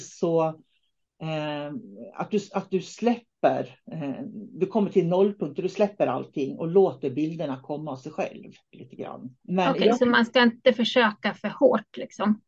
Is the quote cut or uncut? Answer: cut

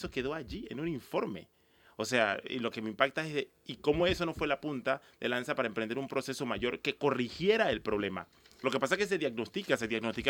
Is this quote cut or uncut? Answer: uncut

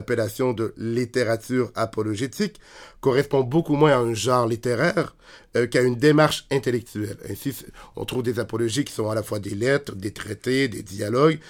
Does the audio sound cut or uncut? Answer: uncut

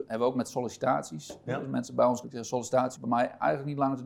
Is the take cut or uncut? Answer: cut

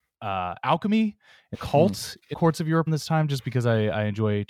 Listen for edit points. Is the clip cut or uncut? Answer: cut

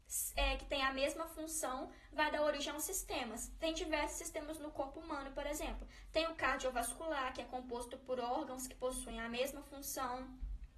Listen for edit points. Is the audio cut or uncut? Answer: uncut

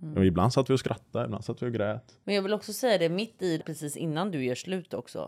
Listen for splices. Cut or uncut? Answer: cut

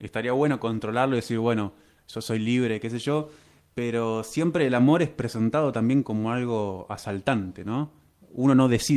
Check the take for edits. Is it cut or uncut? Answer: uncut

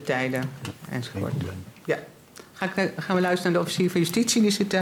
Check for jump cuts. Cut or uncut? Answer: uncut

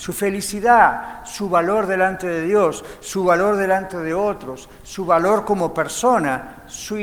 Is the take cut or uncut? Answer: uncut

